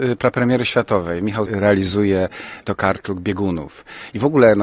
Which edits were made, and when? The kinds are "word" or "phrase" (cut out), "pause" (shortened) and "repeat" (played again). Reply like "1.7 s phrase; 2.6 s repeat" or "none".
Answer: 1.5 s word; 2.6 s word